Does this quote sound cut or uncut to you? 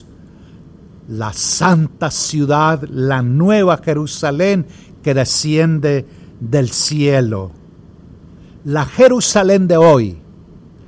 uncut